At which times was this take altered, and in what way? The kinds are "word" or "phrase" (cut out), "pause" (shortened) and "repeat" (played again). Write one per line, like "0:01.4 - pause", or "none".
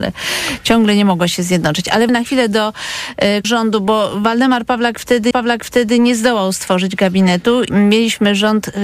0:02.1 - word
0:03.4 - word
0:05.3 - repeat
0:07.7 - word